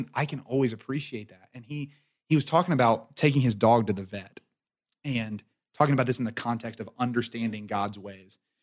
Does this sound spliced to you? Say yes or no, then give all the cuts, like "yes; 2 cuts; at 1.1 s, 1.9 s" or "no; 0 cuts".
no; 0 cuts